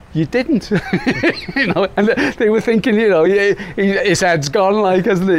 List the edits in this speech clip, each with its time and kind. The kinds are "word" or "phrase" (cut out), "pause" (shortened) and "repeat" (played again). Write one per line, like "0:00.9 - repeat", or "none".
none